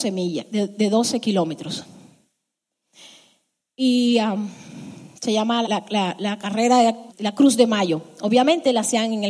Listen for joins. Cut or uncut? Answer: cut